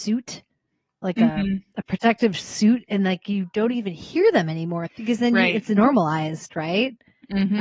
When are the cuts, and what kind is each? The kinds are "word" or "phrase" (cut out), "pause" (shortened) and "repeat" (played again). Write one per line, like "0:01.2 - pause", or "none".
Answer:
0:04.9 - phrase